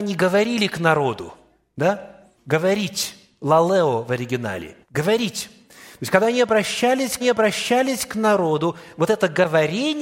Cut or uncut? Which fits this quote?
cut